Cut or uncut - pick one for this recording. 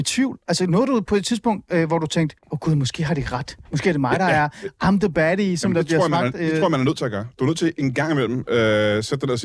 cut